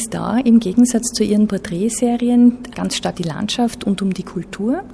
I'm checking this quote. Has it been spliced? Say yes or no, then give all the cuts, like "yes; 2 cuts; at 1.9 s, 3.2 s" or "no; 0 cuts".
yes; 1 cut; at 3.1 s